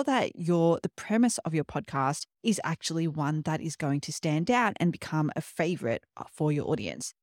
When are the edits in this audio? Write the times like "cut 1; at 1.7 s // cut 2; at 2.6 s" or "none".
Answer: cut 1; at 2.3 s